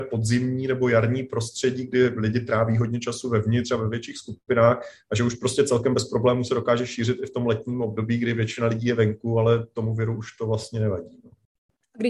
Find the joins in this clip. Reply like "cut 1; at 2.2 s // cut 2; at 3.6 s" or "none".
none